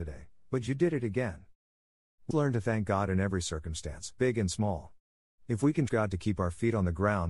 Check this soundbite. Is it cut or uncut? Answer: cut